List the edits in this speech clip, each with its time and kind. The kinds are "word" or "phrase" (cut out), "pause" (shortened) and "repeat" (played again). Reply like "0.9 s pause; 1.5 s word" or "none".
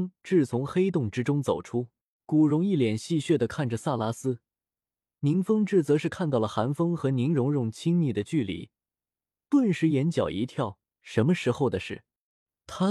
2.2 s pause